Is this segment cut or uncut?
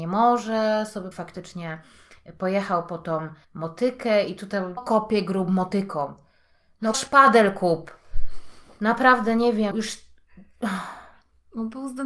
cut